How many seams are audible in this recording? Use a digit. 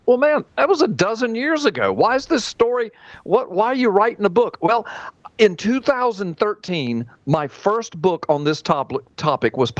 0